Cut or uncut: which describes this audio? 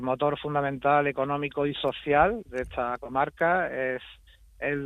uncut